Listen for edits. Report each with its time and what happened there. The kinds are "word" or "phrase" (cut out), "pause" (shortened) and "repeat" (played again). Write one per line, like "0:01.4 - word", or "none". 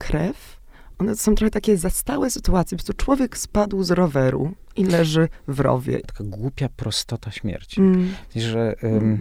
0:00.9 - word